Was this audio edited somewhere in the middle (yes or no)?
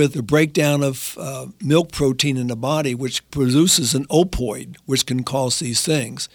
no